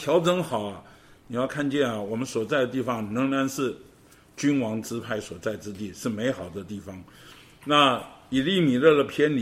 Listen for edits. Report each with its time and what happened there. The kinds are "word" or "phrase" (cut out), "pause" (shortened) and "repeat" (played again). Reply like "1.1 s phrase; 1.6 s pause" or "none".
none